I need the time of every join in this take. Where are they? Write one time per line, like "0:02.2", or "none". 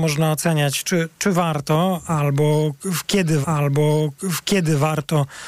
0:03.4